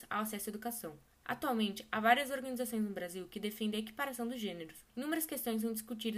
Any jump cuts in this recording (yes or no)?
yes